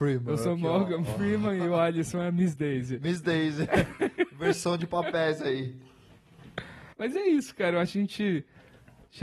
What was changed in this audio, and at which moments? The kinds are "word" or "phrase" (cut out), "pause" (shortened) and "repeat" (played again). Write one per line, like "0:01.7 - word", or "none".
0:06.9 - pause